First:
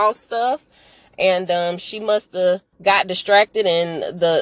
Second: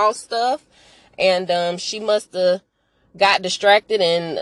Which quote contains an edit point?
first; 1 cut; at 2.7 s

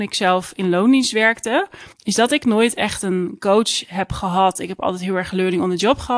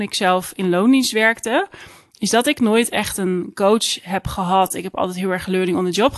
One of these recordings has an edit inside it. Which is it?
first; 1 cut; at 1.9 s

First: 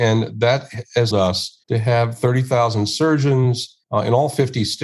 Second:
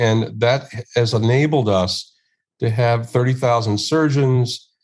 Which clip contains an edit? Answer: first; 3 cuts; at 1.1 s, 1.6 s, 3.8 s

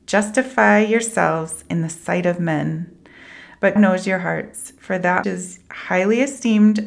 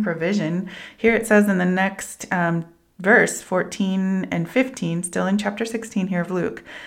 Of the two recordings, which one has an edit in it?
first; 2 cuts; at 3.8 s, 5.2 s

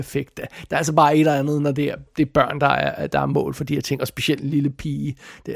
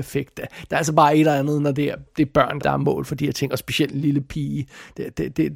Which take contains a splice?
second; 1 cut; at 2.6 s

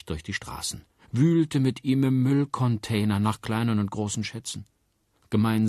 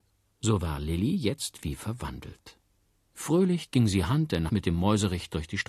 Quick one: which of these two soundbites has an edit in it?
second; 1 cut; at 4.5 s

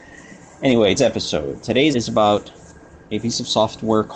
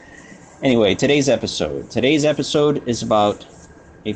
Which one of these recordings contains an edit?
first; 2 cuts; at 1.0 s, 1.9 s

